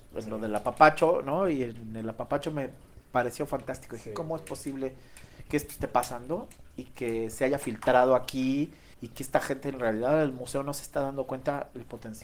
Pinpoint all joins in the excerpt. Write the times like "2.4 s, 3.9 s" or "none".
8.9 s